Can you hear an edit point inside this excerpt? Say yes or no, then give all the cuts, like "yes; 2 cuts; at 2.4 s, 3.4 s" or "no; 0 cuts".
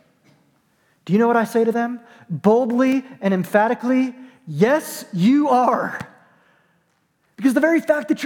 no; 0 cuts